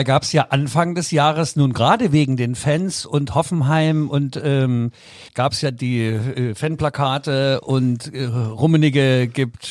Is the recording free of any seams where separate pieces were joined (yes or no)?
no